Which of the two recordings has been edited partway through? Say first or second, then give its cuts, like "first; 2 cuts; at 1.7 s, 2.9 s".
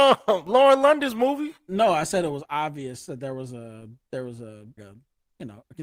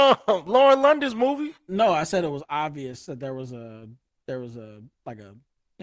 first; 2 cuts; at 4.0 s, 4.8 s